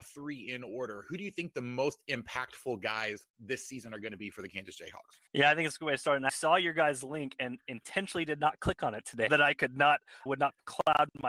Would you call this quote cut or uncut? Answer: cut